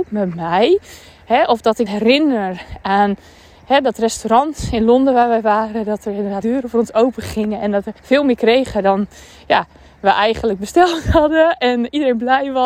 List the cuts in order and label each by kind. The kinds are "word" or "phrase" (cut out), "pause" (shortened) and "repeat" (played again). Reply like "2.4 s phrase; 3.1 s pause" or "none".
1.9 s word; 6.4 s word; 8.0 s pause